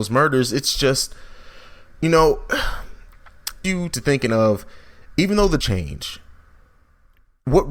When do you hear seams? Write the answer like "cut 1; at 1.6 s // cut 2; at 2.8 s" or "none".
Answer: cut 1; at 3.6 s // cut 2; at 5.6 s